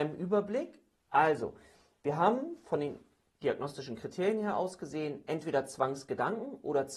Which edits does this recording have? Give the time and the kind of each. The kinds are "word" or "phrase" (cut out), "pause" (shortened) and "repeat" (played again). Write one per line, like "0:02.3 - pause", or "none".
none